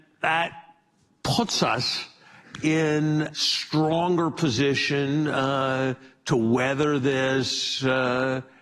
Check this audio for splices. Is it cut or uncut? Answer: cut